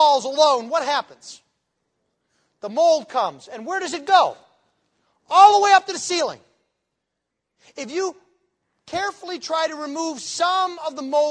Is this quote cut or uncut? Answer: uncut